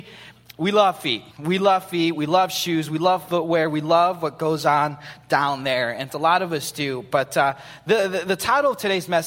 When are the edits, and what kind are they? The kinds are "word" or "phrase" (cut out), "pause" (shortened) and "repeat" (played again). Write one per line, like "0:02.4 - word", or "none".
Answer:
0:01.3 - pause
0:06.1 - word